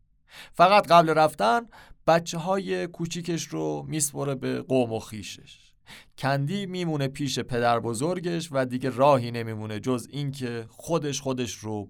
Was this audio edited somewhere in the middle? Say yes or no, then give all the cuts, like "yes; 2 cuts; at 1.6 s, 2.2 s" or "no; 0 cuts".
no; 0 cuts